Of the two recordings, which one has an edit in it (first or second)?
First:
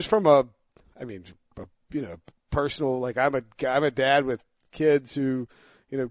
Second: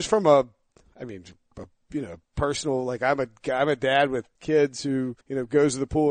second